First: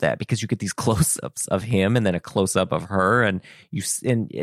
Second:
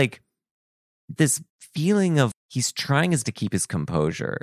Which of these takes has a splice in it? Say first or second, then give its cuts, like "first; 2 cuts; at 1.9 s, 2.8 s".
second; 4 cuts; at 1.2 s, 1.5 s, 2.3 s, 3.2 s